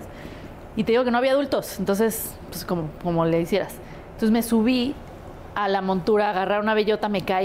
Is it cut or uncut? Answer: uncut